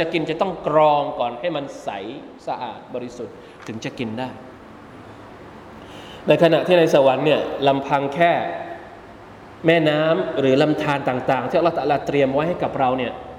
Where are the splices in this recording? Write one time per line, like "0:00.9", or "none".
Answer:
none